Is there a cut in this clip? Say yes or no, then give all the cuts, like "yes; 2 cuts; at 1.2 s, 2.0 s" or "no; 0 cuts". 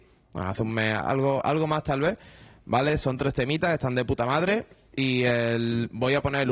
no; 0 cuts